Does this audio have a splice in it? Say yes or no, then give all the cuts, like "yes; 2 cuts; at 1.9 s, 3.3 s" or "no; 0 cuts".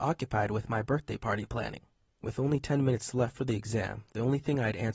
no; 0 cuts